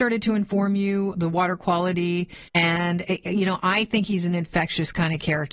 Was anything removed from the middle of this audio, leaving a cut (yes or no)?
yes